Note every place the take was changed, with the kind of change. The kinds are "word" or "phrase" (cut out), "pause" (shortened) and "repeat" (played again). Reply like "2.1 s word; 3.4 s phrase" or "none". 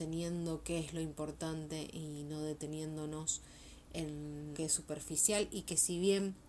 4.5 s word